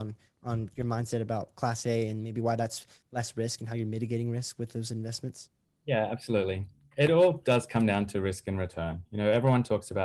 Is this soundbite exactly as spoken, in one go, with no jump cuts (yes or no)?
yes